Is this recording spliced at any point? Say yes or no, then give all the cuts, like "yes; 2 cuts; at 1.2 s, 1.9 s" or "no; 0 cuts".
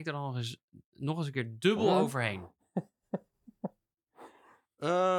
no; 0 cuts